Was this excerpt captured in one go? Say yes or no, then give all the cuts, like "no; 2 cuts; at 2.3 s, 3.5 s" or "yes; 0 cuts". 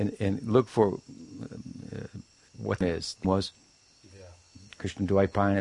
no; 3 cuts; at 2.5 s, 2.8 s, 3.2 s